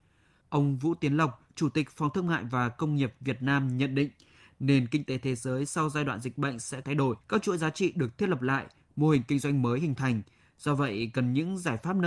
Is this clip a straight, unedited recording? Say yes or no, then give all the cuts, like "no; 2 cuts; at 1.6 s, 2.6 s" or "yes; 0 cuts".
no; 2 cuts; at 6.8 s, 7.2 s